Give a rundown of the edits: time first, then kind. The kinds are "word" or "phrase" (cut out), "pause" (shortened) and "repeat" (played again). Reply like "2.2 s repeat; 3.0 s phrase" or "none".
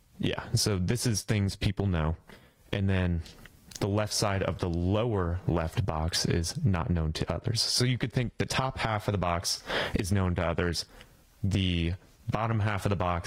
none